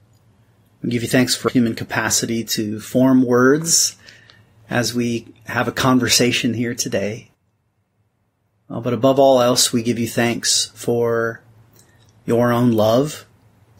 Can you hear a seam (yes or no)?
yes